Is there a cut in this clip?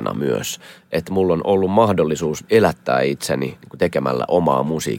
no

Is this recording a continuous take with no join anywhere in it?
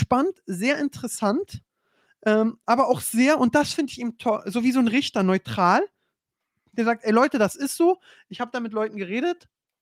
yes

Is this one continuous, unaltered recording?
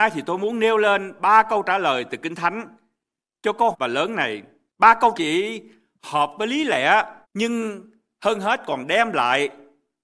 no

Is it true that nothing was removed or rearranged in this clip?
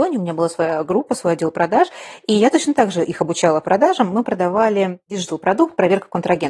yes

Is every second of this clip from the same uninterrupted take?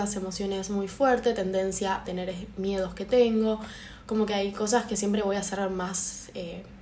no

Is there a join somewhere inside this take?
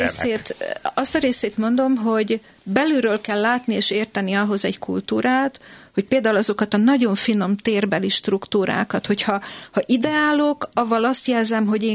no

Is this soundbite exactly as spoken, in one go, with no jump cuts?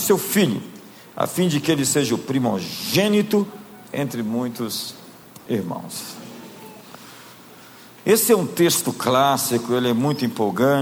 yes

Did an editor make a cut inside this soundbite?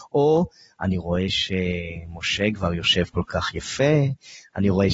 no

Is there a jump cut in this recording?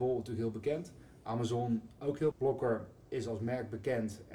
yes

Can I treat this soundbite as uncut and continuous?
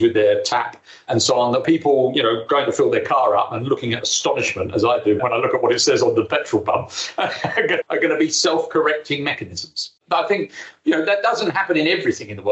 no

